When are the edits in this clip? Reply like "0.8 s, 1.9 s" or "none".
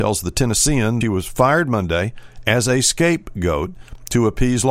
1.0 s